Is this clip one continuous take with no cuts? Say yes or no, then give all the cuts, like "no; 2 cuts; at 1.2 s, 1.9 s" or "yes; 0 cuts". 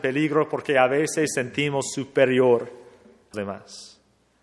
no; 1 cut; at 3.3 s